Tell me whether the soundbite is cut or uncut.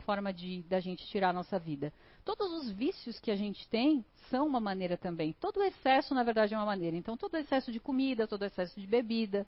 uncut